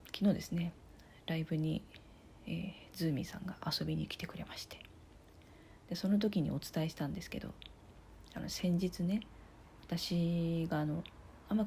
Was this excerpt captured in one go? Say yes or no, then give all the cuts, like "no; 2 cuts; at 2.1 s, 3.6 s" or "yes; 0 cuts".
yes; 0 cuts